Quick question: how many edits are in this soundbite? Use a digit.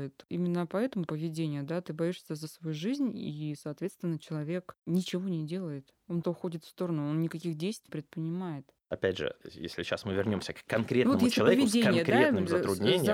3